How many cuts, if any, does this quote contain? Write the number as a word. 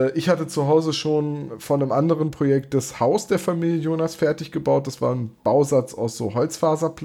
zero